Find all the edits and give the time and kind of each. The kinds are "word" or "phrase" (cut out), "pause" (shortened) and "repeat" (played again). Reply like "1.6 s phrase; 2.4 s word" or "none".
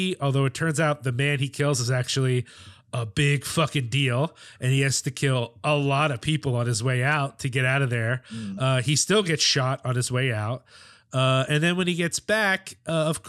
none